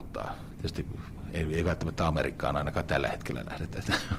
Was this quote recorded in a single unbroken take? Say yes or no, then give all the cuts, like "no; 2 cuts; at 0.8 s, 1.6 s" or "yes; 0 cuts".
yes; 0 cuts